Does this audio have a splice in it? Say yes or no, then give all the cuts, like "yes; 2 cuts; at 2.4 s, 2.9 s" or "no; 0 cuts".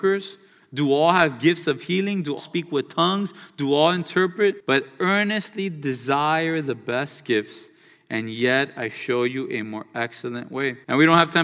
yes; 1 cut; at 2.4 s